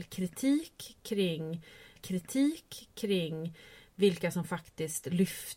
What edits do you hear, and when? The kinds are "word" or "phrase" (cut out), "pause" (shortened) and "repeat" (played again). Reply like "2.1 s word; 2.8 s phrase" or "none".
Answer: 2.0 s repeat